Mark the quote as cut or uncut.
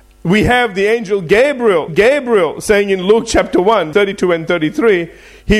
cut